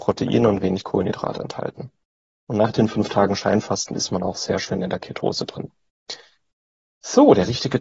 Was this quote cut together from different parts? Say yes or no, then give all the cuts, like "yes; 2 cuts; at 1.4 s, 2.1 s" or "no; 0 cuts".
no; 0 cuts